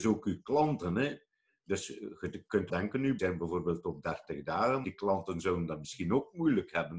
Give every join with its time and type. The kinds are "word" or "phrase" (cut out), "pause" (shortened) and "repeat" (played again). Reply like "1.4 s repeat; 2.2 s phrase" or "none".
2.7 s word; 3.2 s word; 4.8 s word